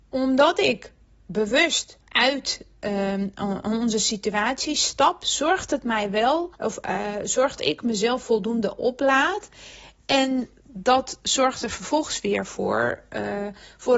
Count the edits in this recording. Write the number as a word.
three